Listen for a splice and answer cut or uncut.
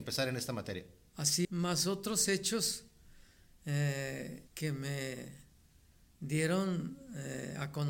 cut